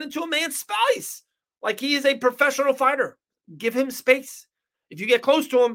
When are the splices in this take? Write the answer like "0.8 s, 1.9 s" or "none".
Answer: none